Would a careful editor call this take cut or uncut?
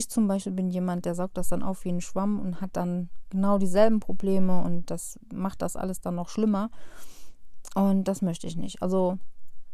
uncut